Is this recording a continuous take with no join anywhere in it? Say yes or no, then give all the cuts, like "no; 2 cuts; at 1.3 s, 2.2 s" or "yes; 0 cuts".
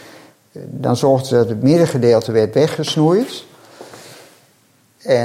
yes; 0 cuts